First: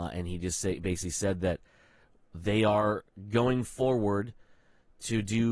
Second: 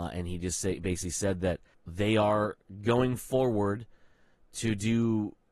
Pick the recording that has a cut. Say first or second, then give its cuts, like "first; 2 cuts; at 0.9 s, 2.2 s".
second; 1 cut; at 1.7 s